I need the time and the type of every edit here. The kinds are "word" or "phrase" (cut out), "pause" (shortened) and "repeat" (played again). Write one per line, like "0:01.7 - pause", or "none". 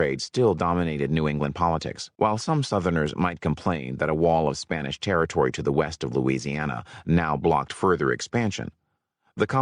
0:02.1 - pause